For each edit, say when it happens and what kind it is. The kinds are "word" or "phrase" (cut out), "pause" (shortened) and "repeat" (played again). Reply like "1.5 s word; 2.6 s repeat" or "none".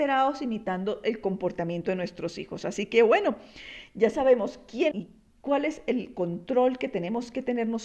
4.9 s phrase